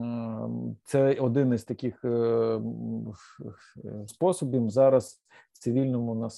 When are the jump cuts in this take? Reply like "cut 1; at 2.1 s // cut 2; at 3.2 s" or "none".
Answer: cut 1; at 4.1 s